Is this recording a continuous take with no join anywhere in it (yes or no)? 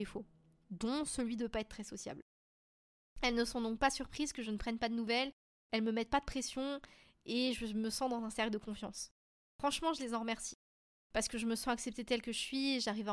yes